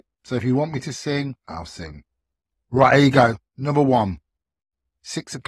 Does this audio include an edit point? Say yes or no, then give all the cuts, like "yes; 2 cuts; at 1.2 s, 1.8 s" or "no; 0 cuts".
yes; 1 cut; at 1.4 s